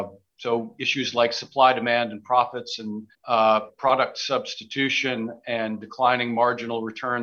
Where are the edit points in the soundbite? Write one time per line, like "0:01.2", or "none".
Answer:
0:03.1